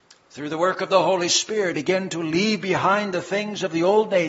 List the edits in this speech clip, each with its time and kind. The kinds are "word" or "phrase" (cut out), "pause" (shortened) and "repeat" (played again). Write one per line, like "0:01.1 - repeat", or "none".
0:01.7 - word